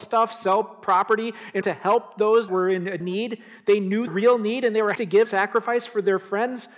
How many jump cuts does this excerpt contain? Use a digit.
6